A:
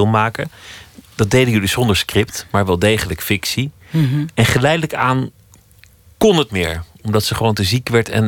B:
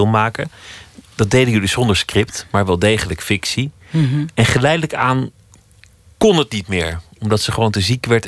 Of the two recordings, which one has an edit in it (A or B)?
A